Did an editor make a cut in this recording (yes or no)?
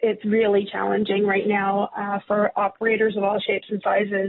no